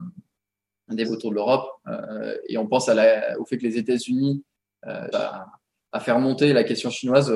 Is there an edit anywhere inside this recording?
yes; 2 cuts; at 1.0 s, 5.1 s

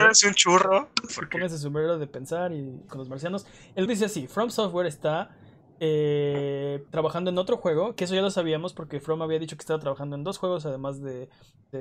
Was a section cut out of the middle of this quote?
yes; 4 cuts; at 1.1 s, 2.9 s, 3.9 s, 6.9 s

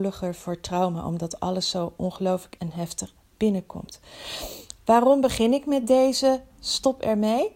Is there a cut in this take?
yes; 1 cut; at 2.6 s

